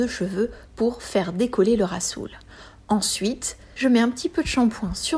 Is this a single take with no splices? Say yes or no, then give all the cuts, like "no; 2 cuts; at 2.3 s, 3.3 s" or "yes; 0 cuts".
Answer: yes; 0 cuts